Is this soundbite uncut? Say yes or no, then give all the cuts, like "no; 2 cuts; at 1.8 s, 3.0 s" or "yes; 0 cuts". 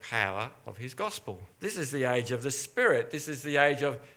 no; 1 cut; at 1.5 s